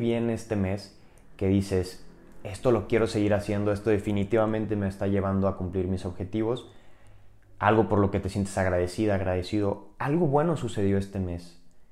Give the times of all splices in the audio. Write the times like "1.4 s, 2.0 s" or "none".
none